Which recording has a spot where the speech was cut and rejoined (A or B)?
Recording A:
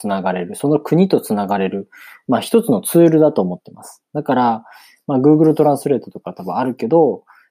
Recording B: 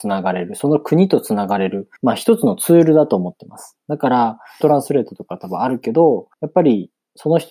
B